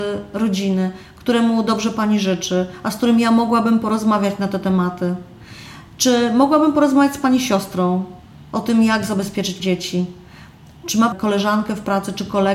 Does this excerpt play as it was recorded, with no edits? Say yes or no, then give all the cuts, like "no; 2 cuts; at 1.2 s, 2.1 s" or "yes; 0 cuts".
no; 2 cuts; at 9.6 s, 11.1 s